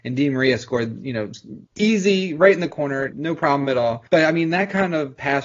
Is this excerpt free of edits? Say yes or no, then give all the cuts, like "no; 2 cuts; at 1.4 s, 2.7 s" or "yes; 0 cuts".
no; 3 cuts; at 1.7 s, 3.1 s, 4.1 s